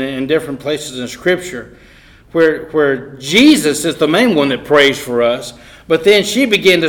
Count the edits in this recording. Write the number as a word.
zero